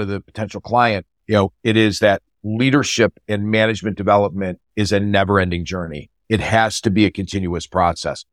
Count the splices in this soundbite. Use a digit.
1